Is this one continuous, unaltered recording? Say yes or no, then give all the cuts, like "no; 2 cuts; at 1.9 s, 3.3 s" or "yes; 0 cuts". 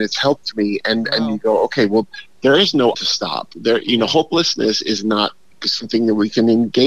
no; 1 cut; at 2.9 s